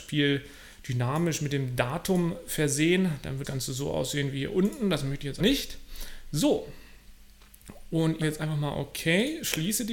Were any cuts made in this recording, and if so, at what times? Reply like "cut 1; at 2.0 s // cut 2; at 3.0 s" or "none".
cut 1; at 3.4 s // cut 2; at 5.4 s // cut 3; at 8.2 s